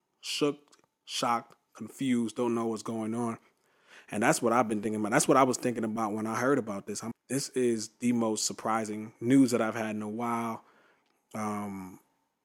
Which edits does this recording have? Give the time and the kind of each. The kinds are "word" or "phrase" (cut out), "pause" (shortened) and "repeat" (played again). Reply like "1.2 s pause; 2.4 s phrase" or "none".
7.1 s phrase; 9.2 s pause

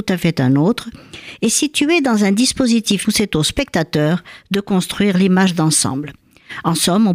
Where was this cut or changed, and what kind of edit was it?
3.0 s word

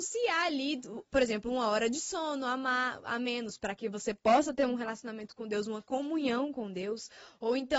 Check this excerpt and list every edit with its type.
none

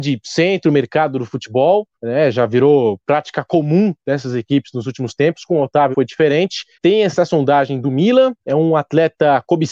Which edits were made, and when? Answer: 1.9 s pause; 5.9 s word; 6.7 s pause; 8.4 s pause

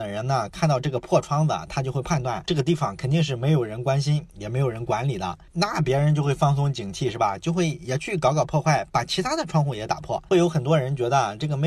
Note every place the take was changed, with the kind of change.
10.3 s phrase

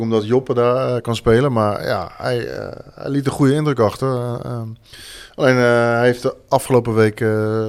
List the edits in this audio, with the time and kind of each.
none

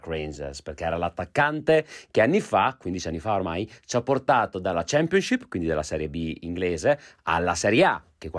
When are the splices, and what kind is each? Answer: none

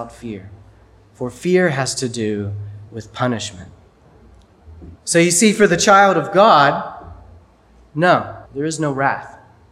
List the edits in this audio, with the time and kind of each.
2.9 s pause; 4.9 s pause; 8.5 s pause

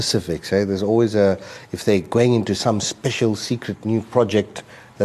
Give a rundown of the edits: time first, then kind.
none

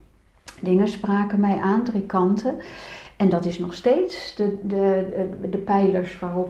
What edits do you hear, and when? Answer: none

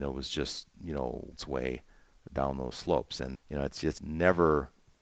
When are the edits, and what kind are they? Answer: 1.3 s word; 3.3 s word; 4.0 s word

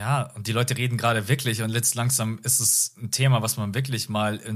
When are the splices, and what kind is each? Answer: none

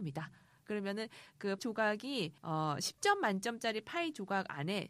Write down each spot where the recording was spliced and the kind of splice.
1.6 s word; 2.4 s pause

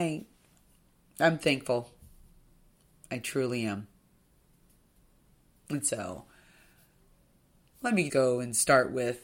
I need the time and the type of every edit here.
8.1 s word

